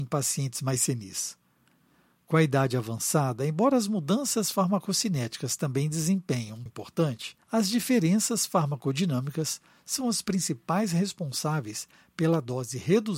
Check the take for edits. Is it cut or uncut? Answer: cut